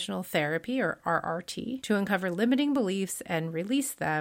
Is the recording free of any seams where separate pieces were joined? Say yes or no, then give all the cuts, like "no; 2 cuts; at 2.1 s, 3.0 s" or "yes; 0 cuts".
yes; 0 cuts